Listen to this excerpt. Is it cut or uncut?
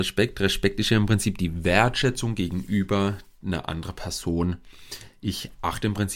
uncut